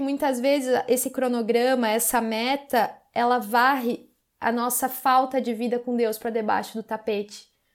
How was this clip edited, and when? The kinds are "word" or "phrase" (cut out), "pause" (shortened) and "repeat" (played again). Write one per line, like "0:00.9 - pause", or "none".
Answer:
none